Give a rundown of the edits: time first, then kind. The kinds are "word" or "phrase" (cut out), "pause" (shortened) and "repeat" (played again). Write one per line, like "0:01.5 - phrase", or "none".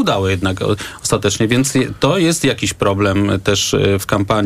none